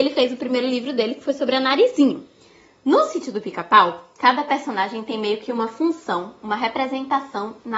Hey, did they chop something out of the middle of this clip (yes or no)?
no